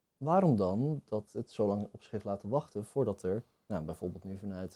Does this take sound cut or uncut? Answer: uncut